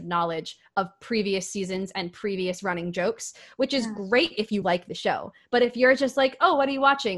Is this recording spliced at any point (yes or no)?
no